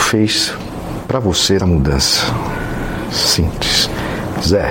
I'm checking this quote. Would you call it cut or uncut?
cut